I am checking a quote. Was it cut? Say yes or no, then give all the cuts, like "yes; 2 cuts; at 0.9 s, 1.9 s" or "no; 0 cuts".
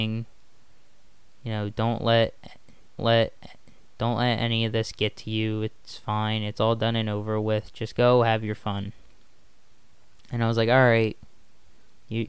yes; 1 cut; at 3.0 s